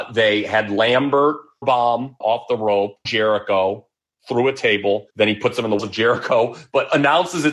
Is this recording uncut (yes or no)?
no